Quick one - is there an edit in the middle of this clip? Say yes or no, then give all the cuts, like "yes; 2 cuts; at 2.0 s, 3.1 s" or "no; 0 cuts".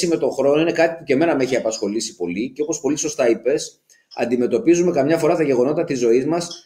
no; 0 cuts